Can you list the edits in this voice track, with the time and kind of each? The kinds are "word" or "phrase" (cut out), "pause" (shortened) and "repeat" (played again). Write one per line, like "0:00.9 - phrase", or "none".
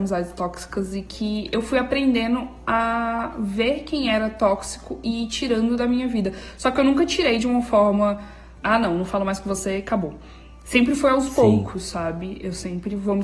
0:08.6 - word